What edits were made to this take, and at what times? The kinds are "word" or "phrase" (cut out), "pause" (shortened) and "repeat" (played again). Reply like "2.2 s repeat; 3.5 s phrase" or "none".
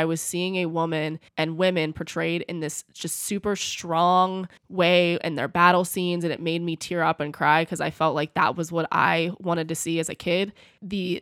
1.3 s pause; 4.6 s pause